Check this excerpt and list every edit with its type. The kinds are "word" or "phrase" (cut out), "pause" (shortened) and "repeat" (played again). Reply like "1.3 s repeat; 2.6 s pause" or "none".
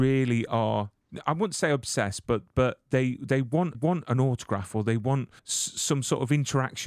1.2 s word; 3.2 s word; 3.7 s repeat; 5.4 s pause